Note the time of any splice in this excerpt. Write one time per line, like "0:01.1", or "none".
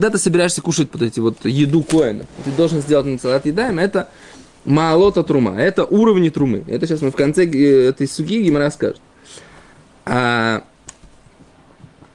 0:00.9